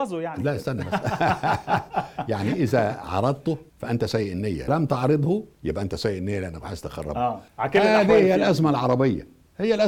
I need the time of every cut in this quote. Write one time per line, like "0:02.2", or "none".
0:03.7
0:04.7
0:05.5
0:07.5

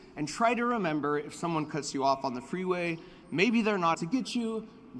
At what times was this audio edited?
0:03.9

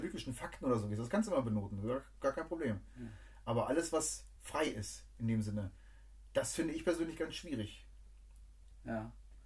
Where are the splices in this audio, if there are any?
none

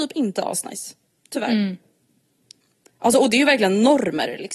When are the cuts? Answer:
none

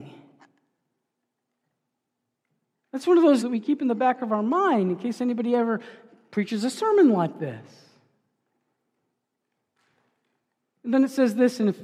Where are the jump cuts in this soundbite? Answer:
0:03.4

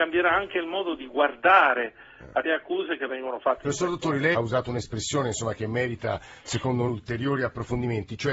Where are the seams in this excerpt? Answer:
0:02.4
0:04.3
0:06.9

